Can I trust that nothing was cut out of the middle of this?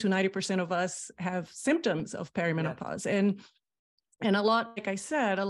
yes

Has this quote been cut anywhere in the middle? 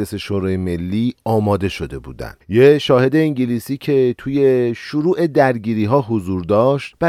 yes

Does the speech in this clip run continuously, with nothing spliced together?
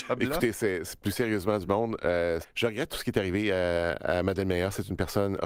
no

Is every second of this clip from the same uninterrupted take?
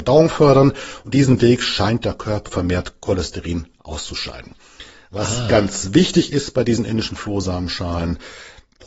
no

